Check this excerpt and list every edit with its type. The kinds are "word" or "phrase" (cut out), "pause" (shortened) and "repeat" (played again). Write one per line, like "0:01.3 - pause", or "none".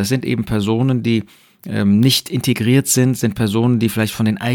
none